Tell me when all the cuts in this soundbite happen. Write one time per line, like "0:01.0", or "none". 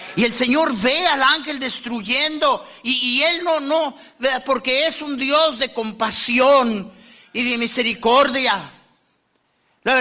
none